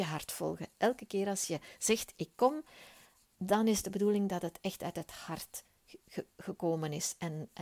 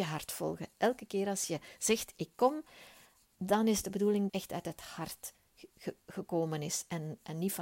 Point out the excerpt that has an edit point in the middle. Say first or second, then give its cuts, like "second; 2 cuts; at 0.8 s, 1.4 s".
second; 1 cut; at 4.3 s